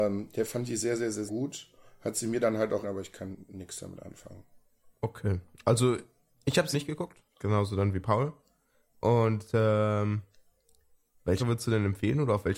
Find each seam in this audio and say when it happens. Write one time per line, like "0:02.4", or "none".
0:01.3
0:02.8
0:04.6
0:06.7
0:07.3
0:11.4